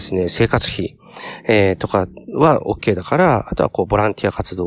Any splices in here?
no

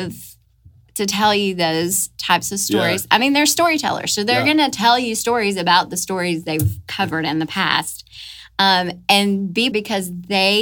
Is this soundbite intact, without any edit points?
no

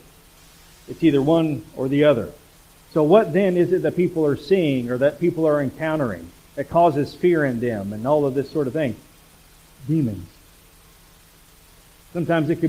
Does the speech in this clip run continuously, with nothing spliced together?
yes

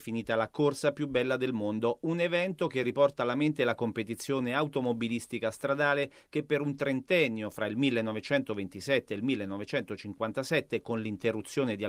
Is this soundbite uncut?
yes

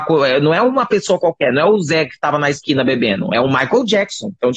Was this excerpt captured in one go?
yes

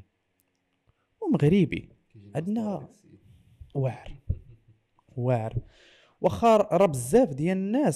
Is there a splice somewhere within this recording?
no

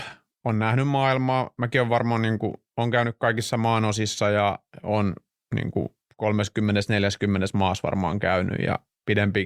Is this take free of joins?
yes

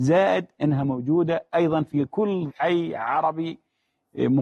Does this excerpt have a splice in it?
yes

